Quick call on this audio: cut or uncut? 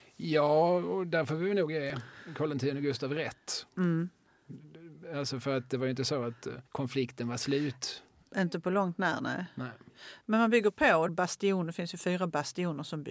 cut